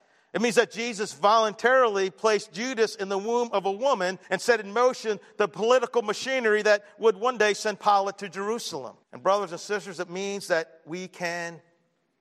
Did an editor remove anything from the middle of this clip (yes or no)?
yes